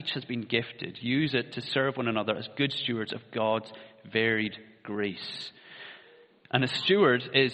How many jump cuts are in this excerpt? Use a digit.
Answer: 0